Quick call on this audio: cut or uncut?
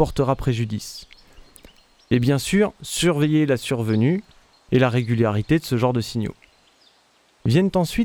uncut